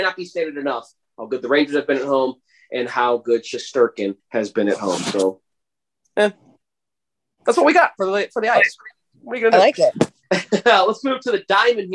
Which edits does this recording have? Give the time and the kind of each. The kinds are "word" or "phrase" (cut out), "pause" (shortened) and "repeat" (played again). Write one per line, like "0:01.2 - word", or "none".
0:04.2 - pause

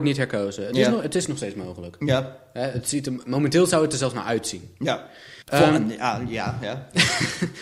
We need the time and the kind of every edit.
0:05.4 - pause

